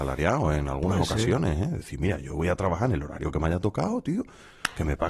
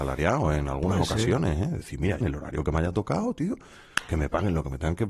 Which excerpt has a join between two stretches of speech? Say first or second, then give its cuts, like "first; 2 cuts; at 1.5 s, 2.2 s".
second; 1 cut; at 2.2 s